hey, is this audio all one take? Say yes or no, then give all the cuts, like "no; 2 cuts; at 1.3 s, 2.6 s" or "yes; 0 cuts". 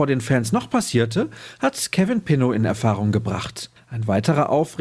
no; 1 cut; at 3.8 s